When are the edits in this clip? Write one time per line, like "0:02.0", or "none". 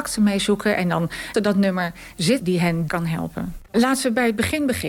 0:01.3
0:02.4
0:02.9